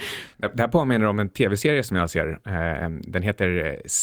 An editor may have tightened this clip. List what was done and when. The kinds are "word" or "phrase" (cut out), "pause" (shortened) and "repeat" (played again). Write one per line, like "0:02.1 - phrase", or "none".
none